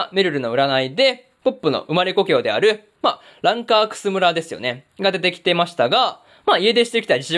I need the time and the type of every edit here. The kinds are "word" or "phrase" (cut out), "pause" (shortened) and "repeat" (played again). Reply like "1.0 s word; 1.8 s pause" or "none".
none